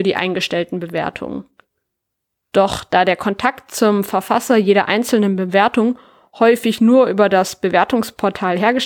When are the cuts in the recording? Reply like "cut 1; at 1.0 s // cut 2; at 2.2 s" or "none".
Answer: none